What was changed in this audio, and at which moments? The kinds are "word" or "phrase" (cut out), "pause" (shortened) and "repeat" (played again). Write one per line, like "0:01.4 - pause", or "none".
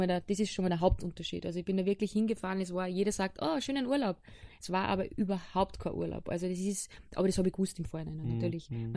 none